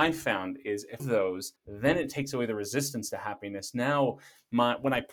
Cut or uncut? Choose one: cut